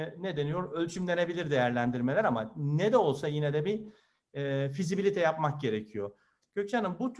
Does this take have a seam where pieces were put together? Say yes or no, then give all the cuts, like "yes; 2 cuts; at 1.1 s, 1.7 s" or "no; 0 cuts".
no; 0 cuts